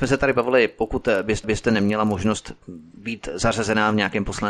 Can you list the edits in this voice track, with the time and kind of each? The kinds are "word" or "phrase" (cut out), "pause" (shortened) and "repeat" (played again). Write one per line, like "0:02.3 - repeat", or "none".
0:01.4 - repeat